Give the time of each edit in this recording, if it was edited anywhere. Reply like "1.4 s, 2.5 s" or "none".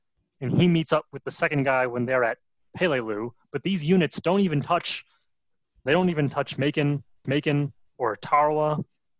5.9 s, 7.2 s